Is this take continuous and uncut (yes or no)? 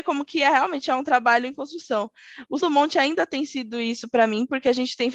no